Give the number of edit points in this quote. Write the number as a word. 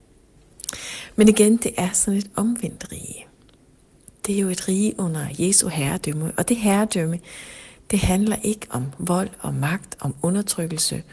zero